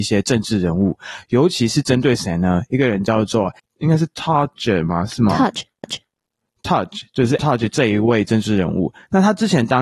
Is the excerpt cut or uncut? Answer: cut